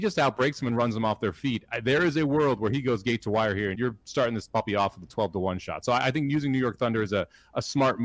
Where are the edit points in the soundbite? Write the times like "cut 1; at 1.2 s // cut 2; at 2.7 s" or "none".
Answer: cut 1; at 3.7 s